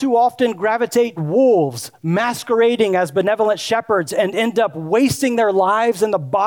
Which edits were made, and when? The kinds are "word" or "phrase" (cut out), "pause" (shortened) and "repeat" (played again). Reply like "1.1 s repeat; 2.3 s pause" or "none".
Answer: 1.2 s word